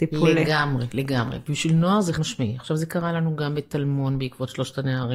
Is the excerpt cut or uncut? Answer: cut